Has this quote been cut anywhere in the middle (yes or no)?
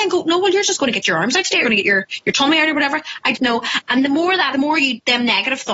yes